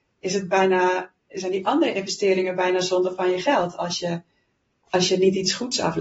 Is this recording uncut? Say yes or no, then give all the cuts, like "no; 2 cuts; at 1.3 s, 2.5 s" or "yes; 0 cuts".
yes; 0 cuts